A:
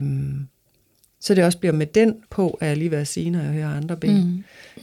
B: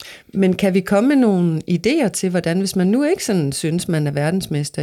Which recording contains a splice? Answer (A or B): A